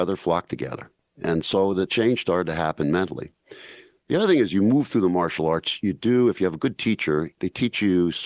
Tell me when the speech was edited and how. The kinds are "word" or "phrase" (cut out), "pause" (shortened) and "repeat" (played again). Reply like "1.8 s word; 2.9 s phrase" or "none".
none